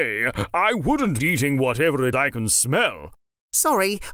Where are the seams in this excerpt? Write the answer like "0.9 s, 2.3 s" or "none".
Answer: 1.2 s, 2.1 s

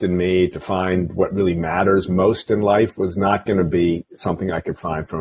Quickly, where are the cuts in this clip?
none

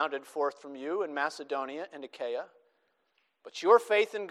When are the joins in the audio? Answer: none

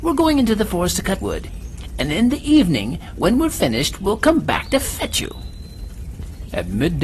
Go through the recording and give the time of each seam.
1.2 s

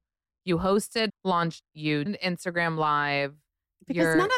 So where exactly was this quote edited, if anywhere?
1.1 s, 1.6 s, 2.1 s

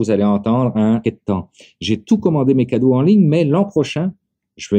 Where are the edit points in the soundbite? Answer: 1.0 s

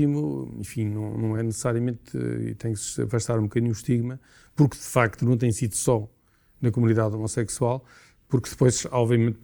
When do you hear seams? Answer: none

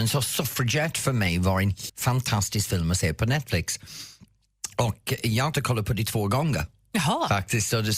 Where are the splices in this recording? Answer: 1.9 s, 5.5 s

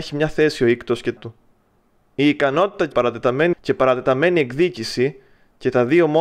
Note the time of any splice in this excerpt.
1.2 s, 1.7 s, 2.9 s, 3.5 s

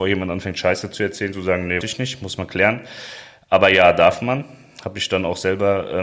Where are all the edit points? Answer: 1.8 s

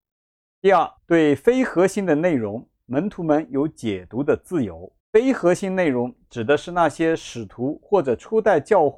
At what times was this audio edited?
1.0 s, 5.0 s

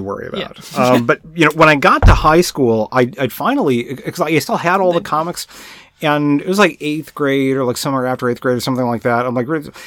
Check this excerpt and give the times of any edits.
none

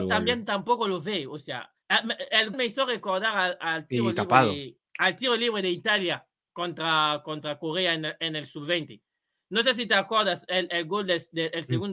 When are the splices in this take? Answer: 1.8 s, 2.5 s, 4.9 s, 10.7 s

